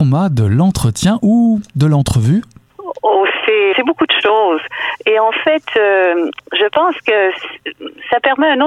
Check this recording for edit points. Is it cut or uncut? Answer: cut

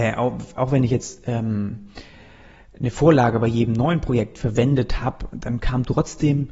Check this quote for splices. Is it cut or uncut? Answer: uncut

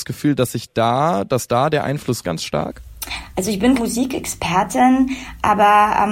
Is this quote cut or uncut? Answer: cut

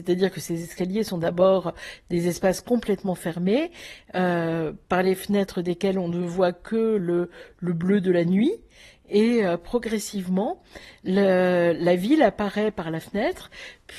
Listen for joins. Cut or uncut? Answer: uncut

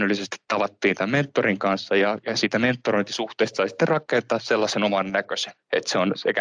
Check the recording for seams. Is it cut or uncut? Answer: uncut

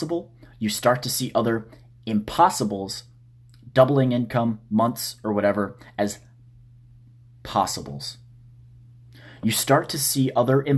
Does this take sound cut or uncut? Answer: uncut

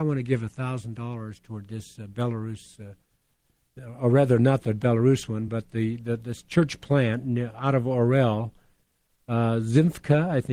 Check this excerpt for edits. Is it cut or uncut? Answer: uncut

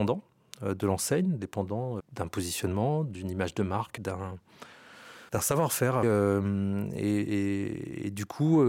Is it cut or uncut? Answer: cut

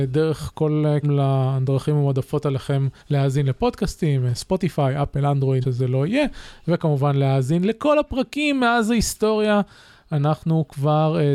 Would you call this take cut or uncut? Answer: cut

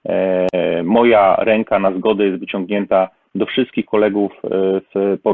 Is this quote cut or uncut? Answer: uncut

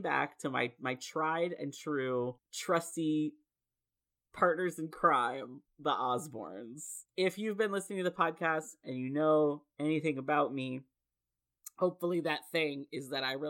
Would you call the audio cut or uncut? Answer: cut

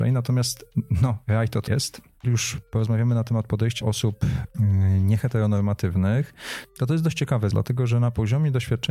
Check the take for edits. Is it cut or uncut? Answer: cut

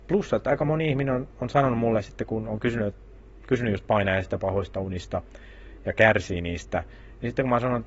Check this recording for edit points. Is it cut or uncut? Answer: uncut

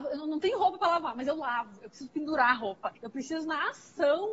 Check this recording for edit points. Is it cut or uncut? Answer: cut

